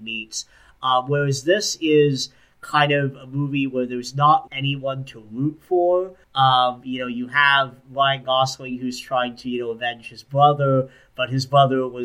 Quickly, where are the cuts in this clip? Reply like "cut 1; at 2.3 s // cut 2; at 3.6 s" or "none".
cut 1; at 4.5 s // cut 2; at 6.2 s